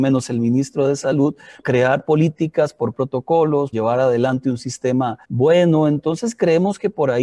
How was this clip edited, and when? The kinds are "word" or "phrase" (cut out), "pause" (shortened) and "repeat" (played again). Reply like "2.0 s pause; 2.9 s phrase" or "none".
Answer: 1.6 s word; 2.9 s word; 3.7 s word; 5.2 s pause